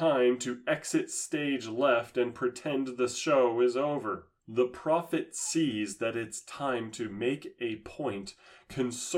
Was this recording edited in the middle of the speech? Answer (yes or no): yes